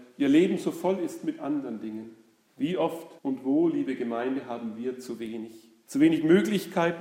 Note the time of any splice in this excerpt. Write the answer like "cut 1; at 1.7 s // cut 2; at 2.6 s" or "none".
cut 1; at 3.2 s